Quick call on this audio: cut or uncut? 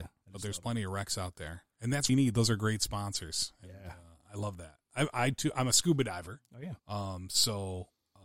cut